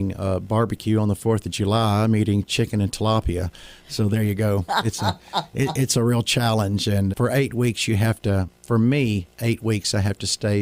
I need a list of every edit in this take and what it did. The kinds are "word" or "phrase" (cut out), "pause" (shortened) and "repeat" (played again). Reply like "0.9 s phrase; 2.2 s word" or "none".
7.1 s word